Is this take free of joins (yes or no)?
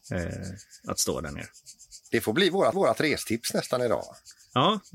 no